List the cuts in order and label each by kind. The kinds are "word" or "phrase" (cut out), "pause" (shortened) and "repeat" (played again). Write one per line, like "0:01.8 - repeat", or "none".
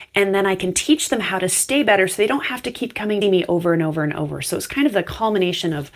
0:03.2 - word